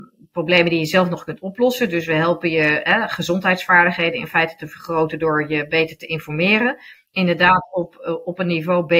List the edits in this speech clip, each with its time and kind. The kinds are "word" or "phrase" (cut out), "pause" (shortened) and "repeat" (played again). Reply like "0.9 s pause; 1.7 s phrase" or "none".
none